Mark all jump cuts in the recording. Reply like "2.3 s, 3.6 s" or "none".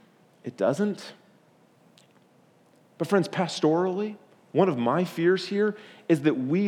none